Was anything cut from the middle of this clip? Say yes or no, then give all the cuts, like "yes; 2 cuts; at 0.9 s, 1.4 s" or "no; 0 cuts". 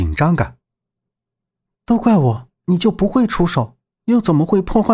yes; 1 cut; at 2.6 s